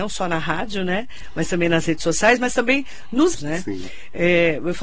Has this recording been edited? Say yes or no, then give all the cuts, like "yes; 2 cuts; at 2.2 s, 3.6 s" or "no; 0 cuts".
yes; 1 cut; at 3.3 s